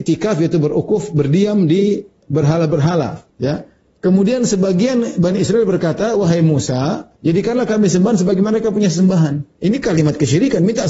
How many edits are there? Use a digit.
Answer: 2